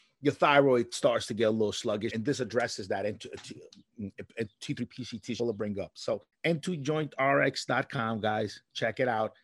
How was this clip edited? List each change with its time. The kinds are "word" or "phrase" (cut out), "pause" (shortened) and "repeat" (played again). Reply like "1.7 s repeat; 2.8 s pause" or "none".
2.1 s word; 5.4 s phrase; 6.3 s pause